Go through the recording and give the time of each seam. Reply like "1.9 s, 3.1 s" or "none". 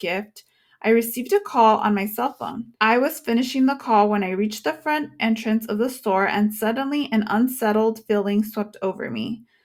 2.8 s